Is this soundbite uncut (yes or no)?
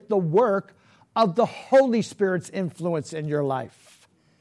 yes